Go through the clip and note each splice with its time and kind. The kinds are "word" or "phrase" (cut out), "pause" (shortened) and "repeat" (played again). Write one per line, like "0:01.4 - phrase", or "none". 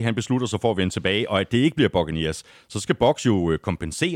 none